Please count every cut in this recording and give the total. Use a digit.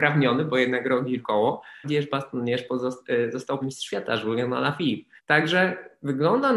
4